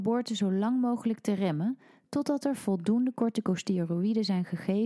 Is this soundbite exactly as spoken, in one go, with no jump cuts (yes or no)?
yes